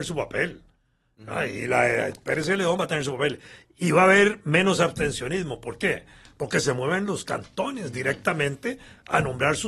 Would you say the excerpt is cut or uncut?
uncut